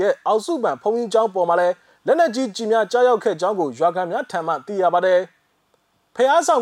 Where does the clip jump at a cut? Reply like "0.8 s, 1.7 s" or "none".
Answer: none